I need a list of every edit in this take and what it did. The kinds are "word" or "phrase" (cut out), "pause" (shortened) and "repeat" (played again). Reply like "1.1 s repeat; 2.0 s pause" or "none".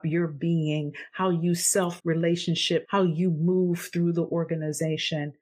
2.0 s word; 2.8 s word